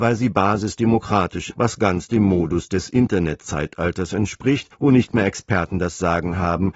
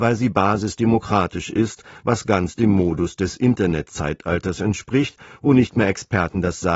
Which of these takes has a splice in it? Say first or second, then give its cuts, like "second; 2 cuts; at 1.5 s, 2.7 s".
first; 2 cuts; at 1.5 s, 4.7 s